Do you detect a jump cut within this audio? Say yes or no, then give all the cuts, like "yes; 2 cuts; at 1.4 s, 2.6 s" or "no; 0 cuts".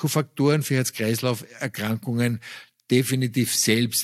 no; 0 cuts